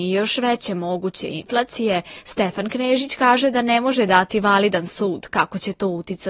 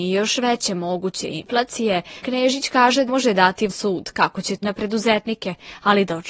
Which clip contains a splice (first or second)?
second